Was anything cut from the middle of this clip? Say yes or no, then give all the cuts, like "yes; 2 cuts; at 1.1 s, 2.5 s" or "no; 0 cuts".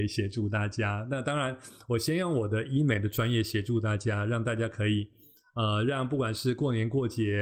no; 0 cuts